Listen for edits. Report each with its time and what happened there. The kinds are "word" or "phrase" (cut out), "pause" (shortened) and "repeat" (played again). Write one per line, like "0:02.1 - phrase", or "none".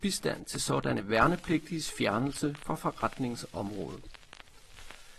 none